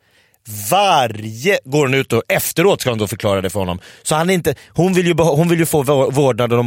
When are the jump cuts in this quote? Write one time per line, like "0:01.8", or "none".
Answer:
none